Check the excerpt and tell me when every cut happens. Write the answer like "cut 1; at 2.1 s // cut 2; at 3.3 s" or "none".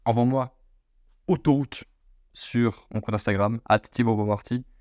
none